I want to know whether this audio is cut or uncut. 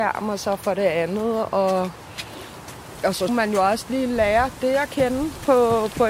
cut